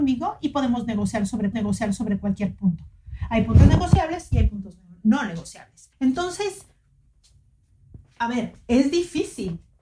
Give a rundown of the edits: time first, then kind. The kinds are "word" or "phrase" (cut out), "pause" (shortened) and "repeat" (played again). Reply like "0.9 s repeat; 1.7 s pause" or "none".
1.5 s repeat; 5.9 s pause